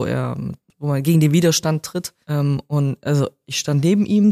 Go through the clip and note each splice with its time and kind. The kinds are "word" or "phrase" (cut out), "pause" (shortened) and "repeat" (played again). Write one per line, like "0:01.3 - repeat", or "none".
none